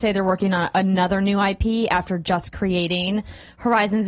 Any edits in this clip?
no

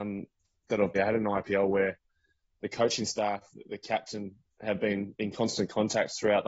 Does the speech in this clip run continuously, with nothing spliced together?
no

